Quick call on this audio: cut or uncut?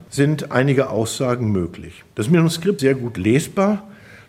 cut